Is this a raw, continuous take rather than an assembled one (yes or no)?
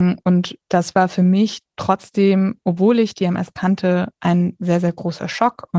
yes